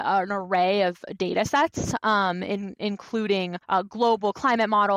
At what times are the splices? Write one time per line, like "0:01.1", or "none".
0:03.6